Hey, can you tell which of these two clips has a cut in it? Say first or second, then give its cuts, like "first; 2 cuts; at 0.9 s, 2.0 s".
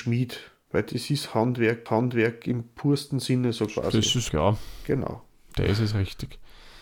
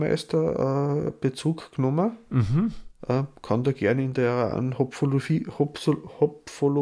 first; 2 cuts; at 1.9 s, 4.3 s